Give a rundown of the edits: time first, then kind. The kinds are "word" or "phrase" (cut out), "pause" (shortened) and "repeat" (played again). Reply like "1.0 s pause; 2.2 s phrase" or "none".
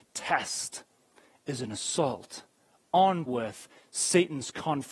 3.3 s word